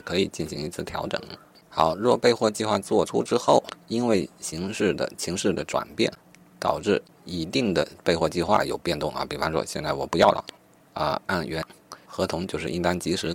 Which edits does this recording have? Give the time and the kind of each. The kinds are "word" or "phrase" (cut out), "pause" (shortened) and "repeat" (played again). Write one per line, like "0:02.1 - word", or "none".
none